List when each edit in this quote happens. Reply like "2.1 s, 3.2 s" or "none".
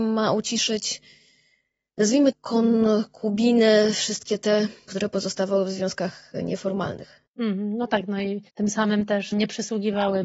2.3 s, 4.9 s, 8.5 s, 9.3 s